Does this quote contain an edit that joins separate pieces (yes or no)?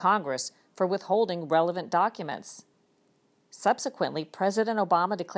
no